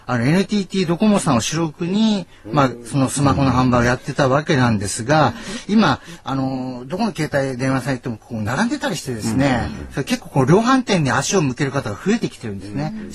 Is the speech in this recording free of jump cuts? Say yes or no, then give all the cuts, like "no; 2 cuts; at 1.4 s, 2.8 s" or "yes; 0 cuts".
yes; 0 cuts